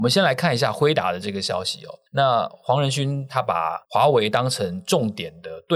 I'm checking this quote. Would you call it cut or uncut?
cut